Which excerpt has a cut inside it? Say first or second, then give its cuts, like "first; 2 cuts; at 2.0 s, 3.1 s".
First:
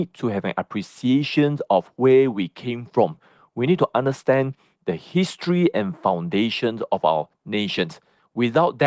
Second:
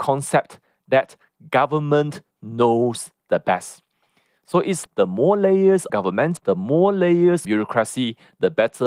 second; 4 cuts; at 4.8 s, 5.9 s, 6.4 s, 7.4 s